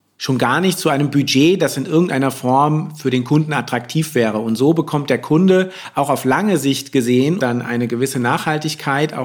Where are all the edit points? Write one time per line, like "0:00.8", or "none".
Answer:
0:07.4